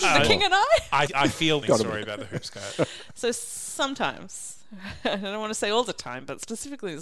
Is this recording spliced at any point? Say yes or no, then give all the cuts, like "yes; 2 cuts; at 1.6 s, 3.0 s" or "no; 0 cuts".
yes; 2 cuts; at 1.1 s, 1.6 s